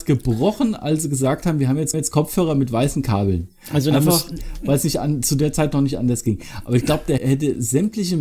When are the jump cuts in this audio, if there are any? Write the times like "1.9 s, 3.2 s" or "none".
1.9 s, 7.2 s